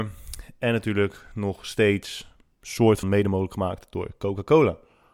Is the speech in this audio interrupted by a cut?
yes; 1 cut; at 3.0 s

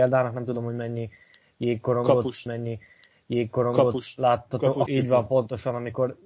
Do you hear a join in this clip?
yes; 2 cuts; at 2.5 s, 4.9 s

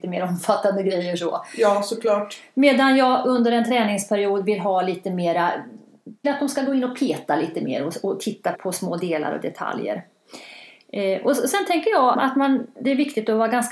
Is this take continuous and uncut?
no; 3 cuts; at 6.2 s, 8.5 s, 12.1 s

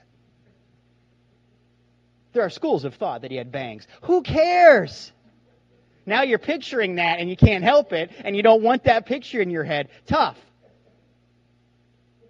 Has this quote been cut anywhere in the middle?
no; 0 cuts

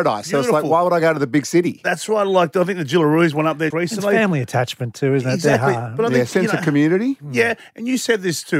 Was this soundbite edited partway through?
yes; 1 cut; at 3.7 s

